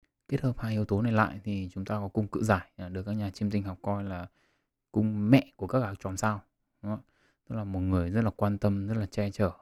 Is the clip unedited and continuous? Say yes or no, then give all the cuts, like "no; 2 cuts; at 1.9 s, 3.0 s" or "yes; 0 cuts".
yes; 0 cuts